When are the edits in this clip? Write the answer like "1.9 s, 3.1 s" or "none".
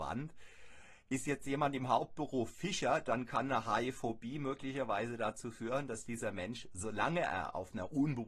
none